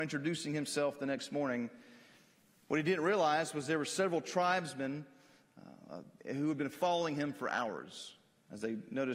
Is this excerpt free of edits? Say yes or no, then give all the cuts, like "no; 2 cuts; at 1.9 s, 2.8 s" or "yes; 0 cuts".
yes; 0 cuts